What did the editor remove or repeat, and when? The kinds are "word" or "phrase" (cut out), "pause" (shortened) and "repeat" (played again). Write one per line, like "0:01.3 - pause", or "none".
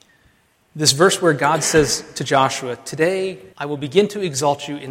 0:03.5 - pause